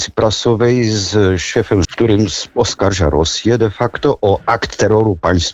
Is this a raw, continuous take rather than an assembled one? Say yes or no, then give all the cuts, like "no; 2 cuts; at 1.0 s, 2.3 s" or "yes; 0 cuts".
no; 1 cut; at 1.8 s